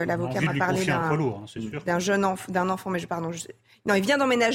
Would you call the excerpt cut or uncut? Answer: uncut